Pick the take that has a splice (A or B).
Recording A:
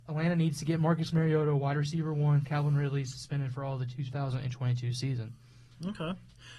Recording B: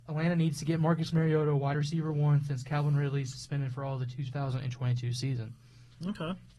A